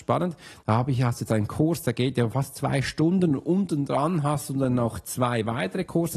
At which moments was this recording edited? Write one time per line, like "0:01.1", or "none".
none